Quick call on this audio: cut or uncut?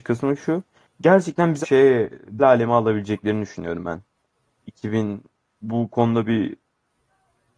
cut